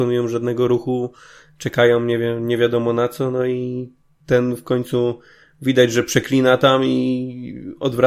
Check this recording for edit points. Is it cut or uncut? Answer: uncut